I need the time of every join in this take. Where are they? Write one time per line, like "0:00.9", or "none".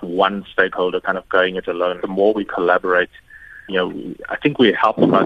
0:02.0
0:03.7